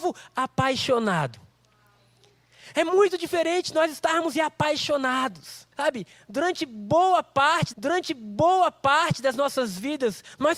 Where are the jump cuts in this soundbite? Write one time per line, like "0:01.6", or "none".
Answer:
0:04.3
0:05.7
0:07.7